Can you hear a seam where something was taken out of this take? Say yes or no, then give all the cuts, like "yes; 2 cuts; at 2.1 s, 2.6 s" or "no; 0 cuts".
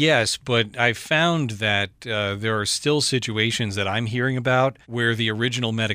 yes; 1 cut; at 4.8 s